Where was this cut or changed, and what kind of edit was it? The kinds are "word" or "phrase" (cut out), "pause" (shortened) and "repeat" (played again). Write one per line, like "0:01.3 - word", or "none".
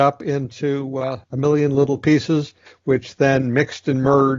0:01.2 - pause
0:02.7 - pause